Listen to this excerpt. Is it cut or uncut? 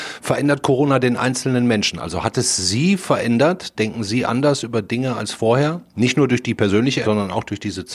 cut